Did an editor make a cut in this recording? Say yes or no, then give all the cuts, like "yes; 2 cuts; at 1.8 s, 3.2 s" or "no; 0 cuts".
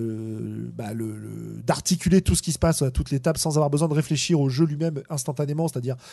no; 0 cuts